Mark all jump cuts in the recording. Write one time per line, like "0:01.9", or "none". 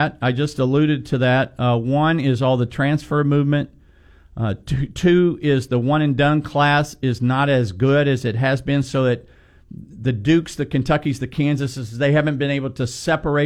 none